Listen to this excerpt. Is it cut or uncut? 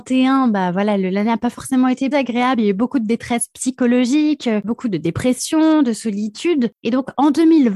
cut